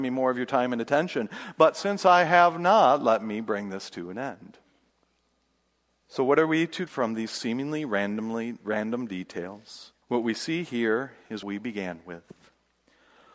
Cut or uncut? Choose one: cut